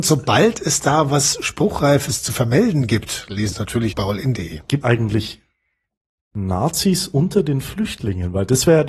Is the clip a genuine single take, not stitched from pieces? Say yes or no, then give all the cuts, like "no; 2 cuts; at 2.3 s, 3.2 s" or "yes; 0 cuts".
no; 3 cuts; at 3.5 s, 3.9 s, 4.8 s